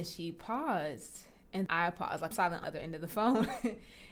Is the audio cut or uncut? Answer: cut